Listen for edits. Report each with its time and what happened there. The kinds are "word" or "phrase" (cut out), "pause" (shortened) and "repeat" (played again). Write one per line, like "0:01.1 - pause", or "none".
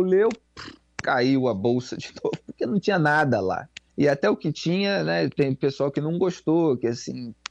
0:03.9 - pause